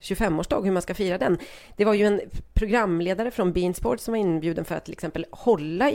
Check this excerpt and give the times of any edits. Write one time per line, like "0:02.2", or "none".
none